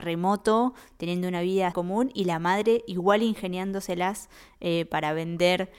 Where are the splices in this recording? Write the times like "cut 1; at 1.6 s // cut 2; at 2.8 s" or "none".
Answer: cut 1; at 1.7 s